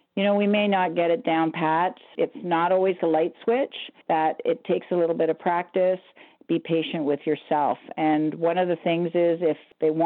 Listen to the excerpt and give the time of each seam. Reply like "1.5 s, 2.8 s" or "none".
3.0 s, 4.0 s

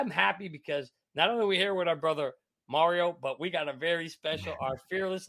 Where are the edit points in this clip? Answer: none

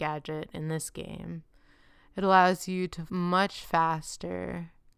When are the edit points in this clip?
3.1 s

